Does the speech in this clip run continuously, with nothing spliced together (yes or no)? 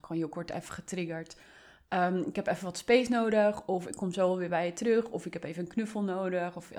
yes